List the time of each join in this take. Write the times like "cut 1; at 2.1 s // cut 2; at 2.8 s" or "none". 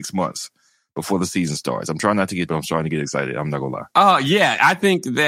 cut 1; at 2.5 s